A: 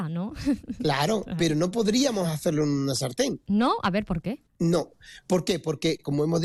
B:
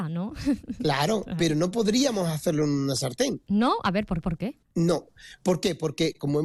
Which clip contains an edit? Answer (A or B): B